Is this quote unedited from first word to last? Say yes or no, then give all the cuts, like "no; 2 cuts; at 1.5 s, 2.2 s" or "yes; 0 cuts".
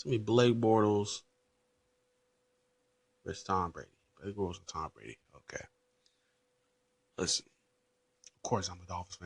yes; 0 cuts